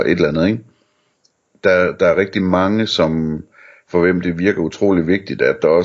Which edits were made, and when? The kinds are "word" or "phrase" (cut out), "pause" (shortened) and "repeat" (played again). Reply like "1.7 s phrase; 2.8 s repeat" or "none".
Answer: none